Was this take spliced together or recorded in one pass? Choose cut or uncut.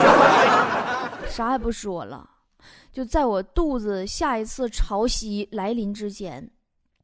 uncut